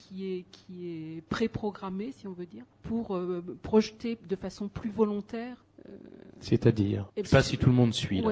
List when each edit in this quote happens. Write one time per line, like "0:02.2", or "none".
0:02.7
0:07.2

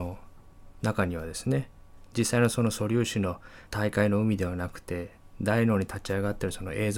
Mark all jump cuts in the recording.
0:03.7

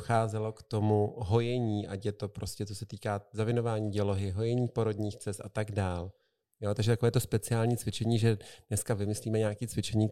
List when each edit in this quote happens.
none

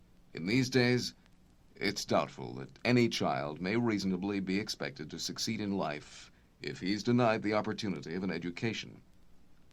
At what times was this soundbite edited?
none

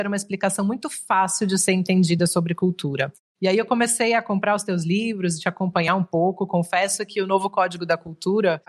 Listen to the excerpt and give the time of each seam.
none

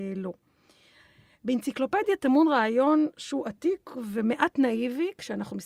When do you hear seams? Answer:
none

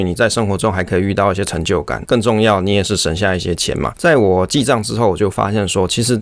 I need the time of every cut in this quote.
0:02.0

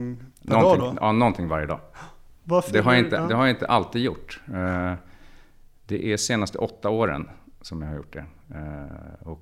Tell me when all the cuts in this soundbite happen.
0:02.4

